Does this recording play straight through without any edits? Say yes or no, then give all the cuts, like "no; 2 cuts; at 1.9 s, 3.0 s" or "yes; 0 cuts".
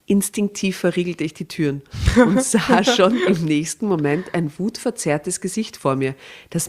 yes; 0 cuts